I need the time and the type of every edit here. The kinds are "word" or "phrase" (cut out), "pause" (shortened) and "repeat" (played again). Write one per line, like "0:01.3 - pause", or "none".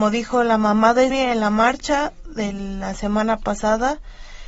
0:01.1 - word